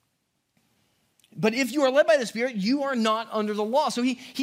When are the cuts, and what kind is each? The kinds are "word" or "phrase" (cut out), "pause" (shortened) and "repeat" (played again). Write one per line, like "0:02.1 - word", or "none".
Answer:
none

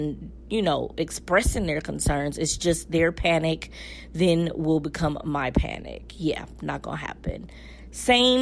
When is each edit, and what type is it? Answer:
none

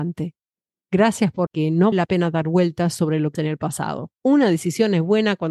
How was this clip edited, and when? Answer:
0:01.5 - word
0:01.9 - word
0:03.3 - word
0:04.2 - pause

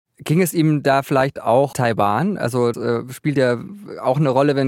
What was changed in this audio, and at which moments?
0:01.7 - word
0:02.7 - word

